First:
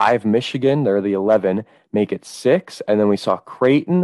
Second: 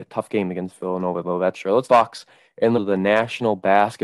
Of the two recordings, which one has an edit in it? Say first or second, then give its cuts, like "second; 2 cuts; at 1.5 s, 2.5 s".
second; 3 cuts; at 1.5 s, 1.9 s, 2.8 s